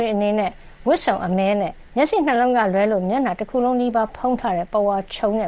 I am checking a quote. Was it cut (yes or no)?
yes